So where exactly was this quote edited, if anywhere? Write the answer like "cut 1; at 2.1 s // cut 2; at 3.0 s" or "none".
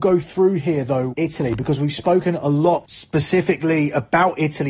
cut 1; at 1.1 s